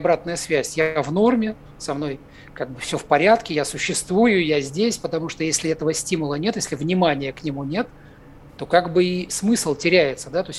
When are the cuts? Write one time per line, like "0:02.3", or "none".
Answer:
none